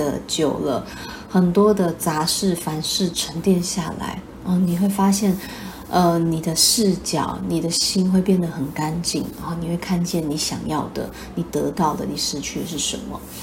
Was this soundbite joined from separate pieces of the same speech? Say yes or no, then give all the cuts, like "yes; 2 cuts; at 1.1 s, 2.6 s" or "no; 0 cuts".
no; 0 cuts